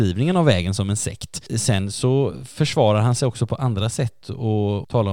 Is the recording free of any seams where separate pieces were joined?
yes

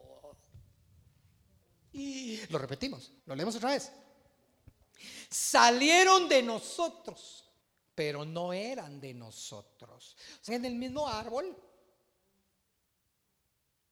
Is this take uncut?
no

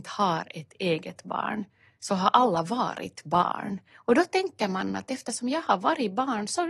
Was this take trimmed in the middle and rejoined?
no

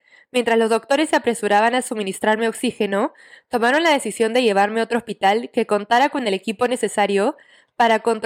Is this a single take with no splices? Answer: yes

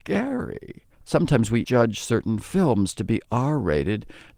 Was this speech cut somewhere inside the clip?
yes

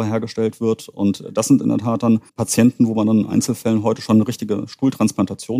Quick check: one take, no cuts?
no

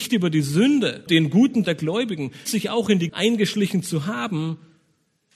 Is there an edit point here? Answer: yes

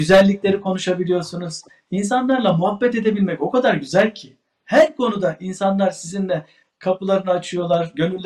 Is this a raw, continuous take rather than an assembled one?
yes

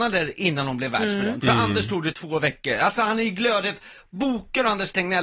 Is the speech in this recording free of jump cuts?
no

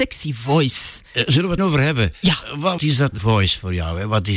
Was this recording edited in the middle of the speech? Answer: yes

